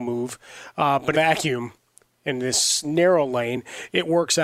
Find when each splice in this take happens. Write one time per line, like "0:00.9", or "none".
0:01.1